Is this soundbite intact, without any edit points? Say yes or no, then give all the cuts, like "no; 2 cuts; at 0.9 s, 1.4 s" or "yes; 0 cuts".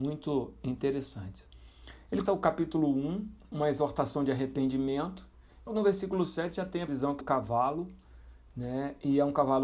no; 5 cuts; at 2.3 s, 3.5 s, 5.7 s, 6.9 s, 7.2 s